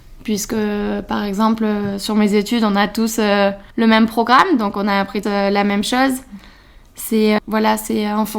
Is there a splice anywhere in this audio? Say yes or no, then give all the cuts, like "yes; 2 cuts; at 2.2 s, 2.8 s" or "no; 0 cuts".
yes; 3 cuts; at 3.7 s, 5.2 s, 7.4 s